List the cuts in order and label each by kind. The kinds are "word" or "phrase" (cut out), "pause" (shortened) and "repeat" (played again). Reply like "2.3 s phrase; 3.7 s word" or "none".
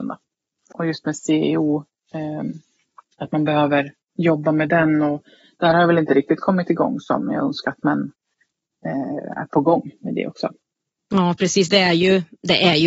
none